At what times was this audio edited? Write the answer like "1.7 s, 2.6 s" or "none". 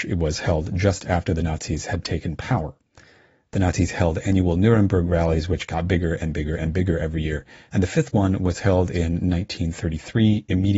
none

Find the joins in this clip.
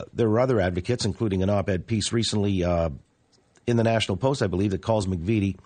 none

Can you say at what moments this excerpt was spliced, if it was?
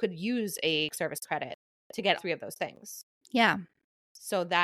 0.9 s, 2.2 s

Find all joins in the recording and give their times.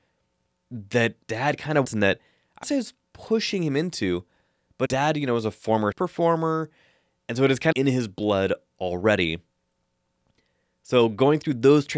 1.2 s, 1.8 s, 2.6 s, 4.9 s, 5.9 s, 7.7 s

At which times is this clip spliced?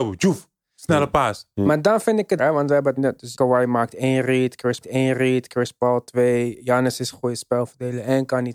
2.4 s, 3.0 s, 3.3 s, 4.8 s, 7.1 s

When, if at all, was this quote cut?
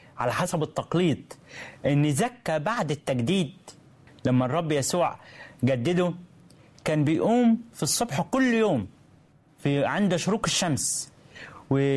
none

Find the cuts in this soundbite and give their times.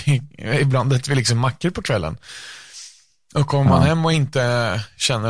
none

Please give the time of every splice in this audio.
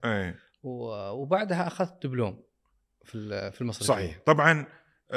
none

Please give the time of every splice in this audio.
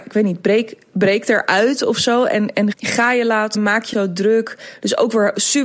2.7 s, 3.5 s, 3.9 s

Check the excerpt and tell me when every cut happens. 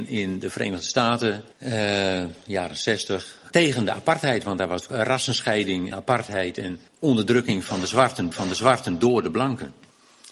1.5 s, 3.5 s, 4.9 s, 5.9 s, 6.9 s, 8.3 s

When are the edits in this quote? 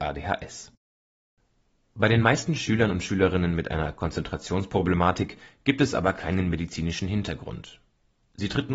none

